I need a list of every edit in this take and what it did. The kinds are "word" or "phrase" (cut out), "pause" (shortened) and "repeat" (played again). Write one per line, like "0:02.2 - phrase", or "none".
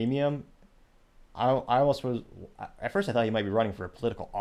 none